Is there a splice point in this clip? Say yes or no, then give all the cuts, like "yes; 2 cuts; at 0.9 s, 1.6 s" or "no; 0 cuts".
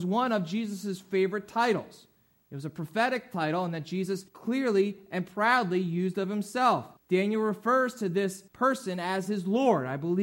yes; 3 cuts; at 4.3 s, 7.0 s, 8.5 s